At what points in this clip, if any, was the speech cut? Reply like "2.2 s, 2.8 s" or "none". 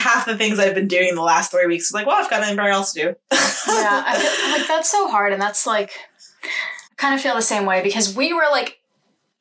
6.9 s